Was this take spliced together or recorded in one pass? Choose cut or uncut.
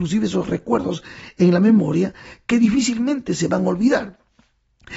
uncut